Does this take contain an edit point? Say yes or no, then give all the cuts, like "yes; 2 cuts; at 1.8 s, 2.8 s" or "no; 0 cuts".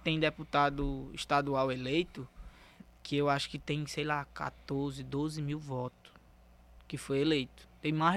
no; 0 cuts